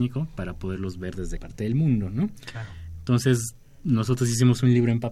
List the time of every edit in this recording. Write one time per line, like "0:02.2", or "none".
0:01.4